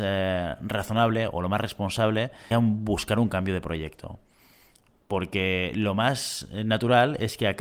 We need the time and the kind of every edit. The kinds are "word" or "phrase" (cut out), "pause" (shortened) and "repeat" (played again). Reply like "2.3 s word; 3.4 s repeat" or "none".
2.5 s word